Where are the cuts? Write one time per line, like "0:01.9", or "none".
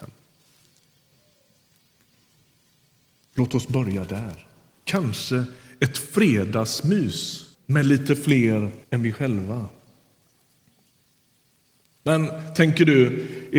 0:04.7
0:07.5
0:08.8

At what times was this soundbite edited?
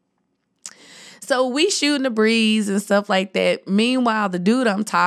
none

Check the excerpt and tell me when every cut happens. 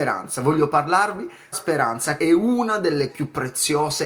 0:01.5
0:02.2
0:03.1

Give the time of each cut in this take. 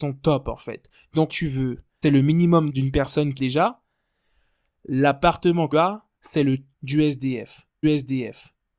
0:01.3
0:02.0
0:02.7
0:03.4
0:05.7
0:06.7
0:07.8

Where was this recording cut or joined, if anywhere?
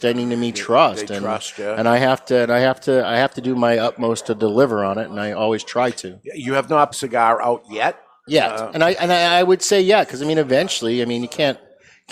0:06.9

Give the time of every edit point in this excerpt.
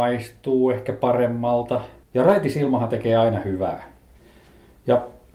0:02.0

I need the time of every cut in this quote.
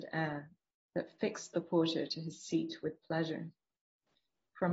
none

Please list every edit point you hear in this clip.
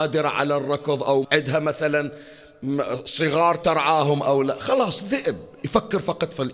0:01.2

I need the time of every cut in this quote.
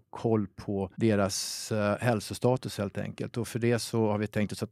0:00.9

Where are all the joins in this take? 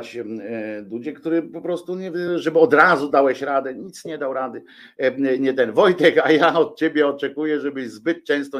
none

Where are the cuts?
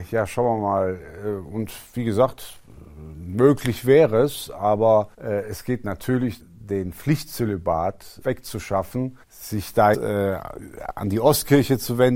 0:05.1
0:06.4
0:08.2
0:09.2
0:09.9

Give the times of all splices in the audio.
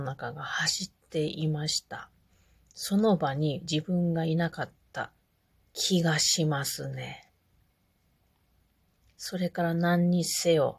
0:05.5

